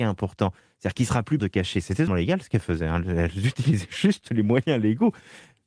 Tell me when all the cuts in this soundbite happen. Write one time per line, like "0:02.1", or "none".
0:01.4
0:02.1